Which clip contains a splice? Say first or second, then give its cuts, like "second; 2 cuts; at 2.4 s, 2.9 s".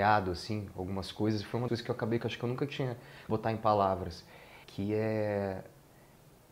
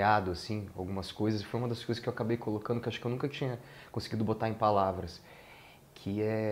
first; 4 cuts; at 1.7 s, 2.2 s, 3.3 s, 4.6 s